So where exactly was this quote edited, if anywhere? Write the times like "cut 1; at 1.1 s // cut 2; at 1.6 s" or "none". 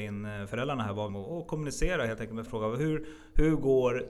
cut 1; at 1.1 s // cut 2; at 2.5 s

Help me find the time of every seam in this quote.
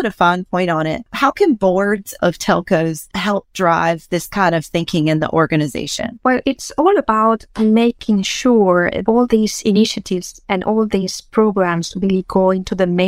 cut 1; at 6.4 s

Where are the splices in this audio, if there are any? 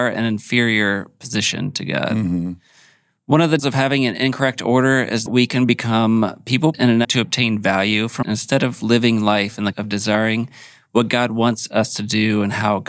cut 1; at 3.6 s // cut 2; at 5.3 s // cut 3; at 6.7 s // cut 4; at 7.0 s // cut 5; at 8.2 s // cut 6; at 9.7 s

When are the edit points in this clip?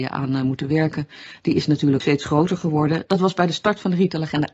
cut 1; at 2.0 s

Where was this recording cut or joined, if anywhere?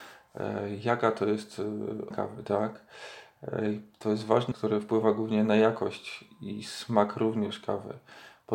cut 1; at 2.1 s // cut 2; at 4.5 s

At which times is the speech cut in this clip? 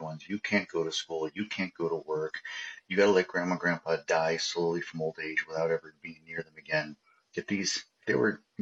none

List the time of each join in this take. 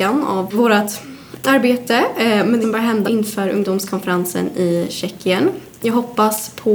cut 1; at 2.6 s // cut 2; at 3.0 s

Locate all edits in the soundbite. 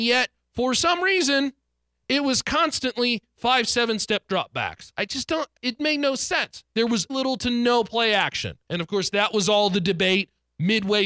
cut 1; at 5.6 s // cut 2; at 7.1 s // cut 3; at 8.6 s

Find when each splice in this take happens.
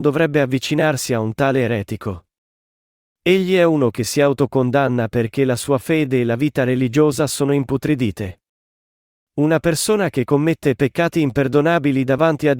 none

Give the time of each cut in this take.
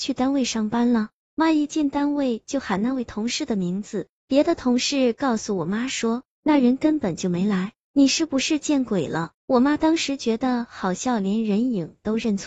cut 1; at 9.4 s

